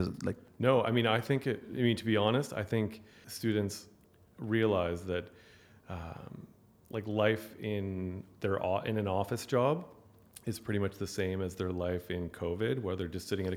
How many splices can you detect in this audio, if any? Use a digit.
0